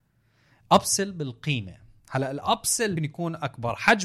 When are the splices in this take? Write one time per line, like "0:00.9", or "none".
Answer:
0:02.0
0:03.0

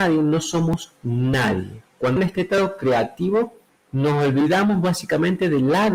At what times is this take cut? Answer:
0:02.2
0:03.7

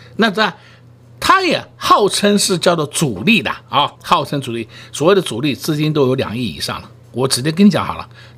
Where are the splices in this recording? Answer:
0:04.0

